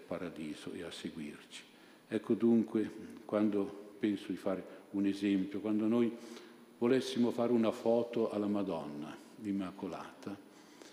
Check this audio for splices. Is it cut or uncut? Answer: cut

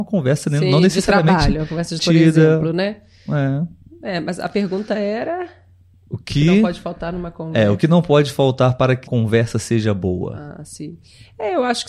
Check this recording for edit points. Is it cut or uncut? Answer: cut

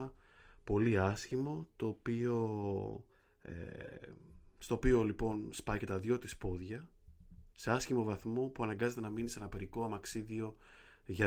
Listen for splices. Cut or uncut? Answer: cut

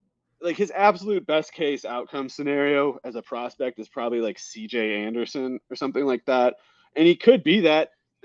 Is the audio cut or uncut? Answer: uncut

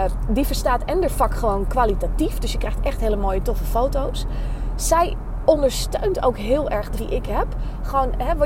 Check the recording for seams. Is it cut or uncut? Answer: cut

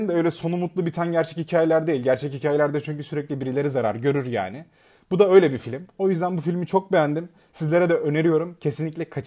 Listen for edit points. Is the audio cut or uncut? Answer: uncut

